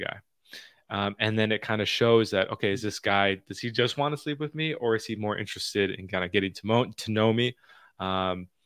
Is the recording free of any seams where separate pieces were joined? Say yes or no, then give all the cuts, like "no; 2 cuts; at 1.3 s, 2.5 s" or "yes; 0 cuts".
yes; 0 cuts